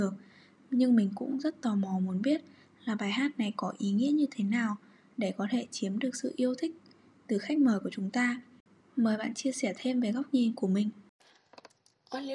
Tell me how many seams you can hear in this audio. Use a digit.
0